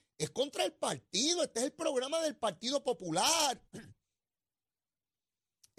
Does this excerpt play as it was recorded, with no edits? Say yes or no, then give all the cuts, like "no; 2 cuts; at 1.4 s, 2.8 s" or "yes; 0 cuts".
no; 1 cut; at 3.7 s